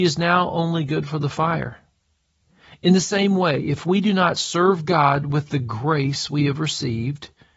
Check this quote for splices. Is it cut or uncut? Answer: uncut